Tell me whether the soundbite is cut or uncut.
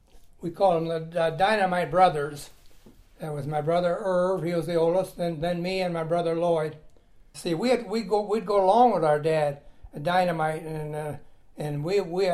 uncut